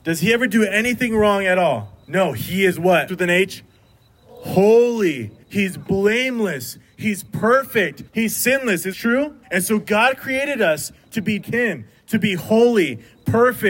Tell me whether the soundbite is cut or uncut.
cut